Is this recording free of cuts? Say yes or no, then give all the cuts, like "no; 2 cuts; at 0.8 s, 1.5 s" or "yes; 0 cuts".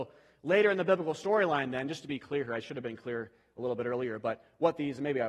yes; 0 cuts